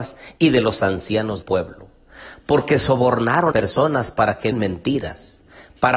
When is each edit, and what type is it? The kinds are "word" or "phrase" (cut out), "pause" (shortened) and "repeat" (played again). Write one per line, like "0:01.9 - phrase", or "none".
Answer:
0:01.4 - word
0:03.5 - word
0:04.5 - word